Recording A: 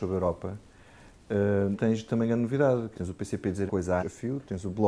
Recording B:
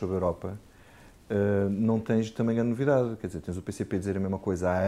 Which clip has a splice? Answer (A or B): A